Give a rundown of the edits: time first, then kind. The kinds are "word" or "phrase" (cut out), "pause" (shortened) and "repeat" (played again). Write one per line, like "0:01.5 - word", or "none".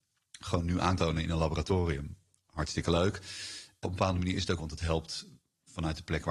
0:01.0 - word
0:03.8 - word
0:04.6 - word